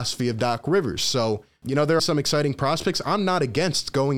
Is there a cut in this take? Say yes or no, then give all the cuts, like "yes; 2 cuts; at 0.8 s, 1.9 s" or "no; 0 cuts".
yes; 2 cuts; at 1.6 s, 2.0 s